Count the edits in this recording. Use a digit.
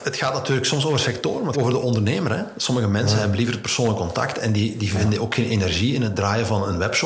1